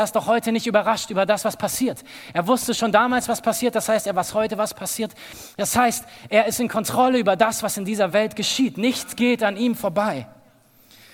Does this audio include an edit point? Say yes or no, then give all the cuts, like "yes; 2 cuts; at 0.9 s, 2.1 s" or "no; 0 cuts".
no; 0 cuts